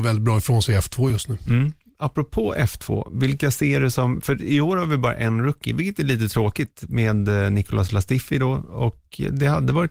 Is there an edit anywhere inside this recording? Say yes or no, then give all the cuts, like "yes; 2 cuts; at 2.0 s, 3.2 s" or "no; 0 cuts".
no; 0 cuts